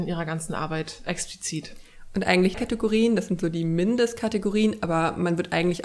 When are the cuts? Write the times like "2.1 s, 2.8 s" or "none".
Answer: 2.5 s